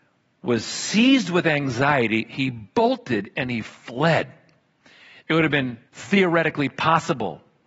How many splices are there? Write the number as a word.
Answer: two